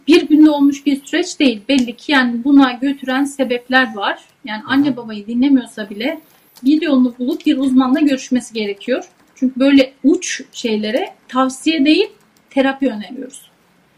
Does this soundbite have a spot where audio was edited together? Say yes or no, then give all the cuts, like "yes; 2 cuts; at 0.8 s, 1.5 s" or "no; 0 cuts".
yes; 1 cut; at 11.2 s